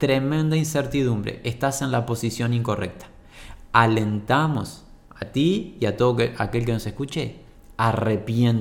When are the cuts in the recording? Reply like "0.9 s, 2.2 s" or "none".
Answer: 5.0 s